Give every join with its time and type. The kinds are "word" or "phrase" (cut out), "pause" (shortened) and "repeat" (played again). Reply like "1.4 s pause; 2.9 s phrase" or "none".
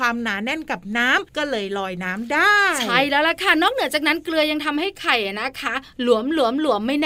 1.3 s pause